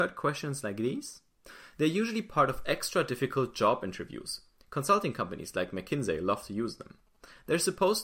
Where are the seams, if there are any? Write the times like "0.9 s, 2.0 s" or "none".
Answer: none